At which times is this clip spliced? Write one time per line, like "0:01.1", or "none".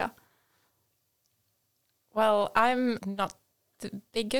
0:03.0